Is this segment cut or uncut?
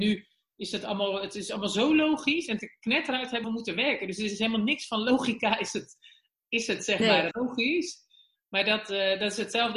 cut